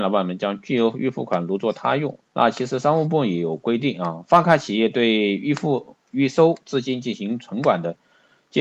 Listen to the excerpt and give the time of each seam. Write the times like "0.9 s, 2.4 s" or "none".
2.3 s